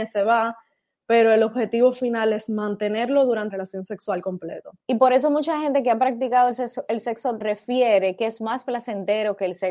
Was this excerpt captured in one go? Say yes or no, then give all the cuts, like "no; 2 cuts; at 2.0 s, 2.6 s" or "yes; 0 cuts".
no; 3 cuts; at 3.5 s, 4.8 s, 7.4 s